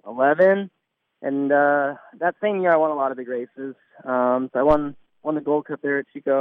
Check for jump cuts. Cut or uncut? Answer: uncut